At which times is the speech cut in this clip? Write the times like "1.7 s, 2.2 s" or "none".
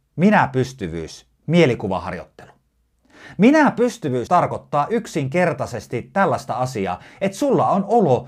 4.3 s